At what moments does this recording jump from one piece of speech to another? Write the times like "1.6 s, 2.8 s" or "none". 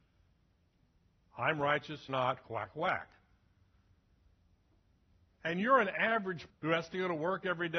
2.1 s, 2.4 s, 6.5 s